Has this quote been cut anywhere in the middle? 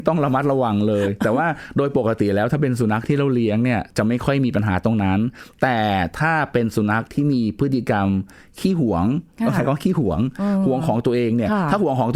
no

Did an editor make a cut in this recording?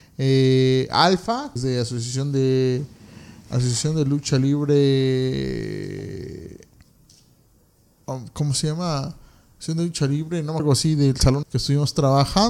yes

